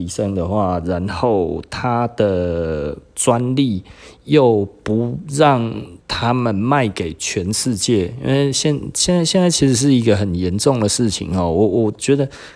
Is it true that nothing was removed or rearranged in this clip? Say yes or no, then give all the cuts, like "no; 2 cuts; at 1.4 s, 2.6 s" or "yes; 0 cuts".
no; 1 cut; at 6.0 s